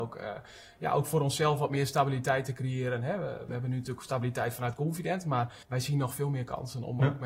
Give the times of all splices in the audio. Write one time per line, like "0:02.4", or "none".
0:05.6